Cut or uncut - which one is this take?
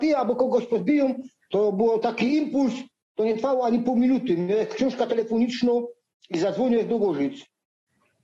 uncut